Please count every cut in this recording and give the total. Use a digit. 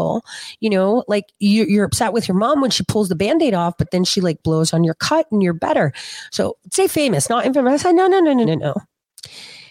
1